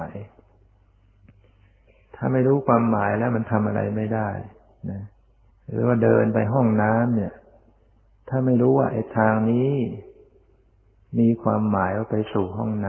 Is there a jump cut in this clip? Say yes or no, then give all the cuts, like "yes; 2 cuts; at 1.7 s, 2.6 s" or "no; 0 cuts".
yes; 1 cut; at 5.5 s